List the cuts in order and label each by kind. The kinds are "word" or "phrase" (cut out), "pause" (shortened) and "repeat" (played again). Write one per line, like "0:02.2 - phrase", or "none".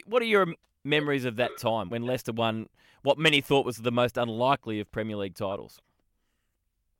0:01.9 - word